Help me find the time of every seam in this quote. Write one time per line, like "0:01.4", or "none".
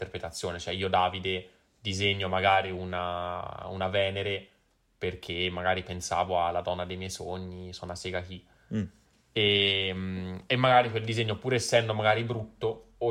none